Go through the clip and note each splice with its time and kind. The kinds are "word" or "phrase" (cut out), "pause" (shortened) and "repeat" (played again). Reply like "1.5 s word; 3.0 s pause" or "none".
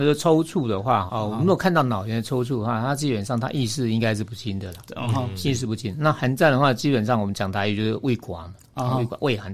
1.1 s word